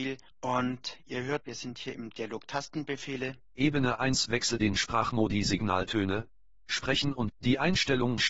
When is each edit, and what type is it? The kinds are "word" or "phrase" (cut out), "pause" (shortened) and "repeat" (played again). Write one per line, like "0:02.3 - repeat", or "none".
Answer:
0:01.4 - word
0:04.6 - word
0:07.3 - word